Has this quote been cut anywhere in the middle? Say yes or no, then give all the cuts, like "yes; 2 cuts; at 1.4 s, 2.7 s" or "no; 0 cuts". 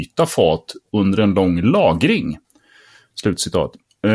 no; 0 cuts